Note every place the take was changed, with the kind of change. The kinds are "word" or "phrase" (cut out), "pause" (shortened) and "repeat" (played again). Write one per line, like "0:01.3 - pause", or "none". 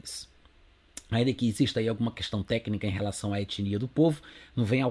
none